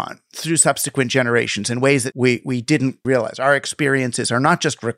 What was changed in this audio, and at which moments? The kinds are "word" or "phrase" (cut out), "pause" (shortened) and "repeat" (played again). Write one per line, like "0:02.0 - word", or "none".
0:02.1 - word
0:03.0 - word

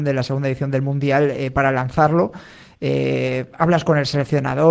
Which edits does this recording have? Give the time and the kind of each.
none

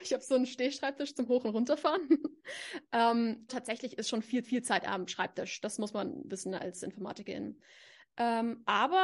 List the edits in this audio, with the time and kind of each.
0:03.5 - word
0:04.4 - repeat

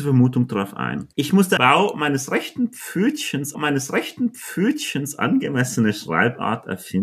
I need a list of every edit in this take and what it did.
0:01.1 - pause
0:01.6 - phrase
0:03.5 - repeat

